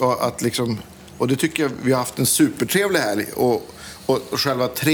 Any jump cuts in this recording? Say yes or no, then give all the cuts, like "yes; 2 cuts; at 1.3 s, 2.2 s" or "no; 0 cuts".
no; 0 cuts